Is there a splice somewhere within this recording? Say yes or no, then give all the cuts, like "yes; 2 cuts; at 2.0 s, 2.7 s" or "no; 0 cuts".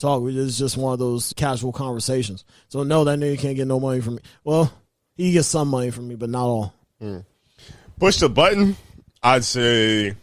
yes; 1 cut; at 1.3 s